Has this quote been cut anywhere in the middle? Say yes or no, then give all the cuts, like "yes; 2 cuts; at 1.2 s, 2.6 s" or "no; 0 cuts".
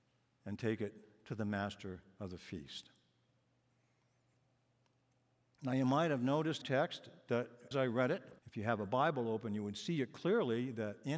yes; 3 cuts; at 6.6 s, 7.7 s, 8.4 s